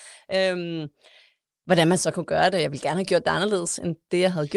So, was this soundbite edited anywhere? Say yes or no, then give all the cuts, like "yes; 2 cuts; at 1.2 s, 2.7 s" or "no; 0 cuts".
no; 0 cuts